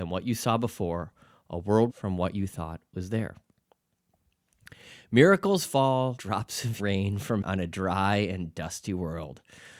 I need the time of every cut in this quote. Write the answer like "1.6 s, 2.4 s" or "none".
1.9 s, 6.2 s, 6.8 s, 7.4 s